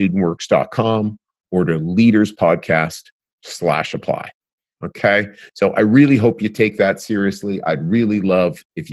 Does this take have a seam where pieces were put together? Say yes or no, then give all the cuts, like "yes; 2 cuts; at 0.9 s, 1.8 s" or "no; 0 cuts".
no; 0 cuts